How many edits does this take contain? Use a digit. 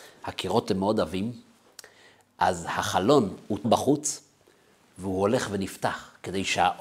1